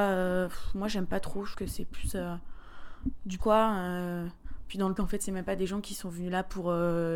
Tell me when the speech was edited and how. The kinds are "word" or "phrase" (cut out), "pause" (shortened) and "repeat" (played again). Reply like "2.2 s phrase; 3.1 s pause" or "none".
1.5 s word; 3.4 s word; 5.0 s word